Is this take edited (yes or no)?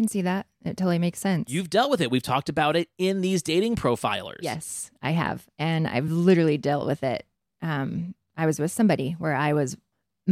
no